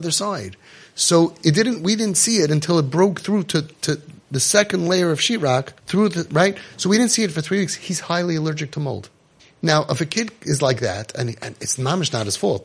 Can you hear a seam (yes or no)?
yes